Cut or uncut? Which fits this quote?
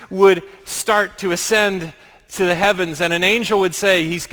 uncut